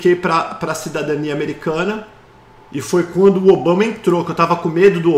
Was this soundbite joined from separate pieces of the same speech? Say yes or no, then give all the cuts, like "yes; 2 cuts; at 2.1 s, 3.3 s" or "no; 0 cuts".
no; 0 cuts